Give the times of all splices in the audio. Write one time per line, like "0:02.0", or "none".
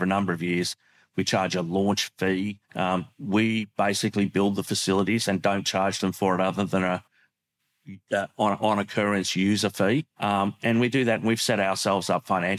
0:02.6
0:10.1